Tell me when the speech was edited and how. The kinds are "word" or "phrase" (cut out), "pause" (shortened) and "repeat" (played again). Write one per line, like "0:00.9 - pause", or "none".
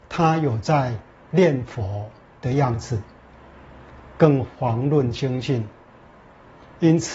none